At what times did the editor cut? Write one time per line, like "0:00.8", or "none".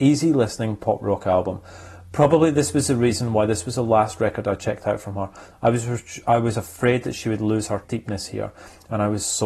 0:07.8